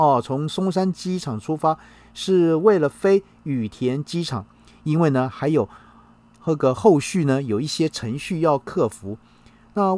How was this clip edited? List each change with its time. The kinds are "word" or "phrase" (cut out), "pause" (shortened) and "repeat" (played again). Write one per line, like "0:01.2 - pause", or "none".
none

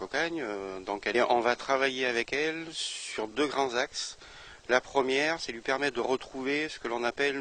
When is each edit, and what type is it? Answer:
0:01.1 - phrase
0:03.3 - word

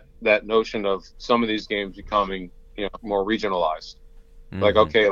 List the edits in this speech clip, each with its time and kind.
0:03.0 - word

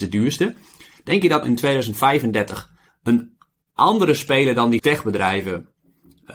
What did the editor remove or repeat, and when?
0:01.4 - word
0:02.9 - pause
0:04.8 - word

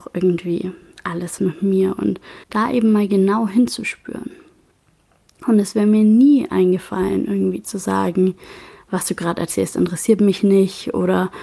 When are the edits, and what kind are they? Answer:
0:01.4 - word
0:02.4 - pause

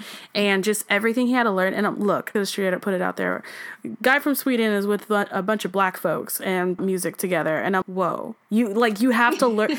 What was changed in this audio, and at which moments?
0:02.3 - phrase
0:06.8 - phrase
0:07.8 - word
0:08.4 - pause

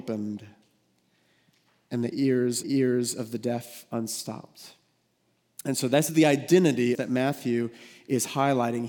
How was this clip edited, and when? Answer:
0:02.6 - repeat
0:06.1 - word
0:06.9 - phrase

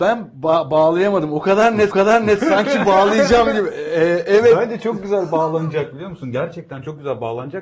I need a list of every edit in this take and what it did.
0:01.9 - repeat

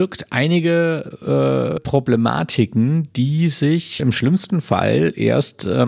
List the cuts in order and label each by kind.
0:01.8 - phrase
0:04.0 - word

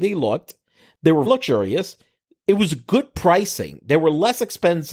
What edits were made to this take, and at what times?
0:01.3 - word

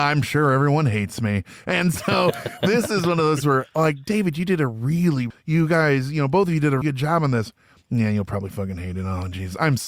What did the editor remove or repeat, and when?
0:03.4 - word
0:05.3 - word
0:06.8 - word

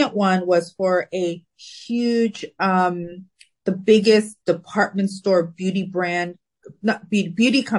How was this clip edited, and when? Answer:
none

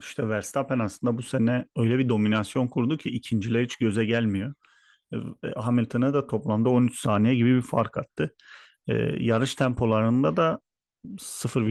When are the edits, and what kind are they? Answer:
0:01.7 - pause

